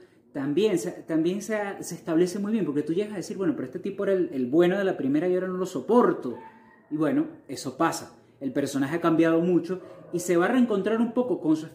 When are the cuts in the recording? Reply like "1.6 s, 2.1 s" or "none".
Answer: none